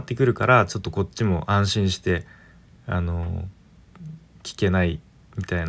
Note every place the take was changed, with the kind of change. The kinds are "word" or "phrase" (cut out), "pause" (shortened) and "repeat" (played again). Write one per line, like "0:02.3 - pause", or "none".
none